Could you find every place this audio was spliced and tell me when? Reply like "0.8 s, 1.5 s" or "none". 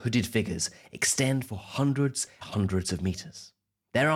2.4 s